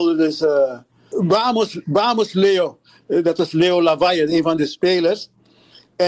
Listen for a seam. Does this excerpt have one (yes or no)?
no